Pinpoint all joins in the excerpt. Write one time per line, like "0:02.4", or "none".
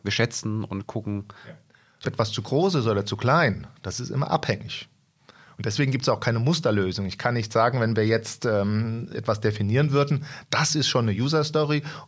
0:02.0